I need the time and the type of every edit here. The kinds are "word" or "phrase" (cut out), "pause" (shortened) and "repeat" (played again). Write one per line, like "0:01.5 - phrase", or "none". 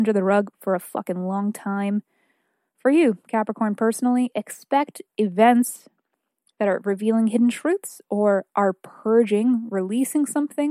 none